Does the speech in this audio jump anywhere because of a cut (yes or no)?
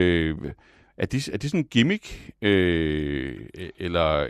no